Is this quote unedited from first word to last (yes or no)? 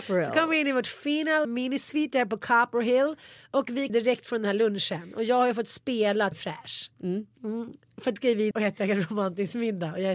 no